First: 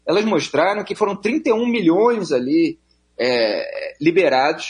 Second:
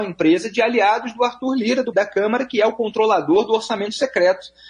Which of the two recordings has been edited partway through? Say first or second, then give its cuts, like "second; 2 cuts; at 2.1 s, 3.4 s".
second; 1 cut; at 1.9 s